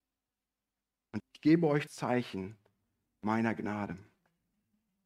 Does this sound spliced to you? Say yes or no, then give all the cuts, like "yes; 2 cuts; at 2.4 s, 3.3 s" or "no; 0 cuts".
yes; 2 cuts; at 1.2 s, 1.9 s